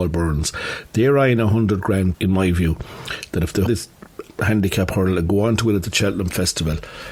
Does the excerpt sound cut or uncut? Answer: cut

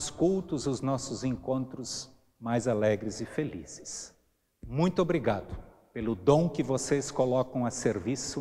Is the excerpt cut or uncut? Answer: uncut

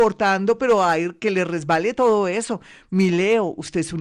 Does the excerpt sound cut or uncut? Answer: uncut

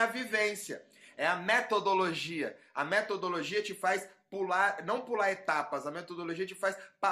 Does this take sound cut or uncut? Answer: uncut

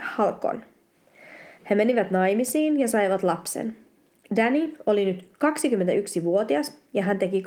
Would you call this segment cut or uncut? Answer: uncut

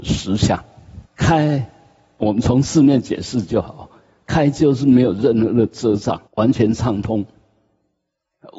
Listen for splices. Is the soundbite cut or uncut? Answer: cut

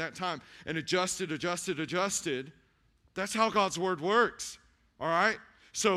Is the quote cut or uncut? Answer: uncut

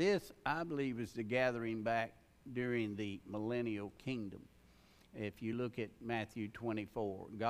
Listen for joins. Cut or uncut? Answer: uncut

